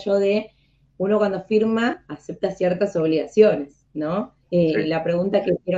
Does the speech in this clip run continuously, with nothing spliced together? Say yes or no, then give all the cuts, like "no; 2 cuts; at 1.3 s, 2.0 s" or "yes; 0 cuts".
no; 1 cut; at 4.4 s